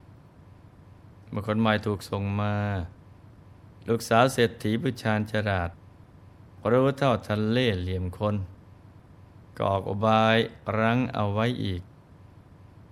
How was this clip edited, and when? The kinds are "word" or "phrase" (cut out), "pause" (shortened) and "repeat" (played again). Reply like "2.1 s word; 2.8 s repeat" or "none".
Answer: none